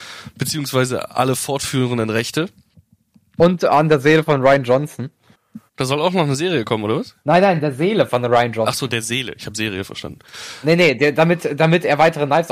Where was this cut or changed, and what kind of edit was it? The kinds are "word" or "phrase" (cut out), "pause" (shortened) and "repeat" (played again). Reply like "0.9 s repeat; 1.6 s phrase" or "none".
5.7 s pause; 7.2 s pause

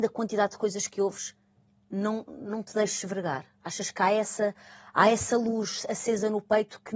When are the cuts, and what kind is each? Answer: none

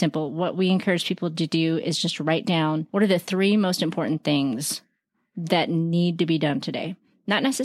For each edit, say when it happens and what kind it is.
2.9 s pause

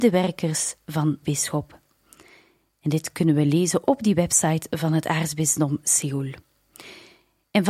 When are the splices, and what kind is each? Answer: 1.2 s word

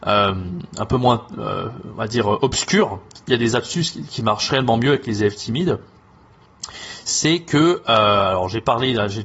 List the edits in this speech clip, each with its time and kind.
none

